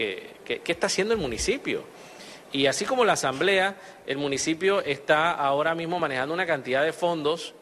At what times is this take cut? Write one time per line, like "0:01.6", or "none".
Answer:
none